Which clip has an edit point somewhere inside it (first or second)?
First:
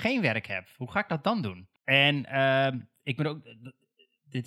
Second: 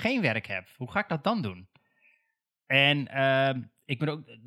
first